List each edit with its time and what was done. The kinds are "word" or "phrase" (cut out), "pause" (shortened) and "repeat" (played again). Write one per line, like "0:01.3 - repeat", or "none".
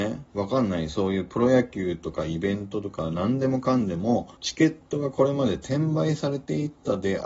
0:04.3 - pause